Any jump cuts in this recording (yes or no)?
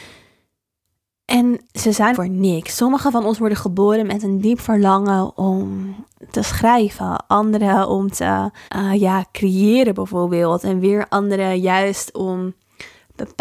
yes